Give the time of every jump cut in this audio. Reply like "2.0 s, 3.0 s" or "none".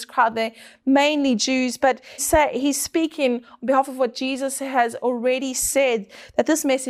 2.2 s